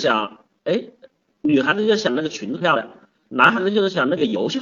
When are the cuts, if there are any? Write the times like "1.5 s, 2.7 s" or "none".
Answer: none